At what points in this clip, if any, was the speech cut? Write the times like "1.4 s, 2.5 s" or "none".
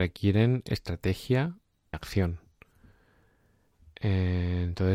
1.9 s